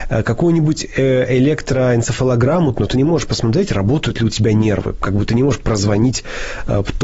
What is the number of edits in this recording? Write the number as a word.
one